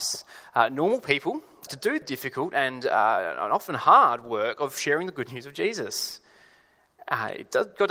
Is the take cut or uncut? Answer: cut